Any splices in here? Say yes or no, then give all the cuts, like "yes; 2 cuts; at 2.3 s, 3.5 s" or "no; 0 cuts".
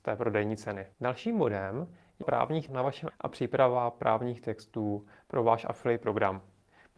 yes; 4 cuts; at 0.9 s, 2.2 s, 2.7 s, 3.1 s